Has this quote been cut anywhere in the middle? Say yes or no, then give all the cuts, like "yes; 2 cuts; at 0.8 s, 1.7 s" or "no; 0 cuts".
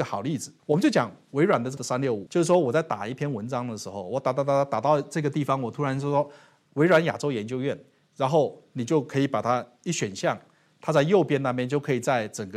yes; 2 cuts; at 1.8 s, 6.7 s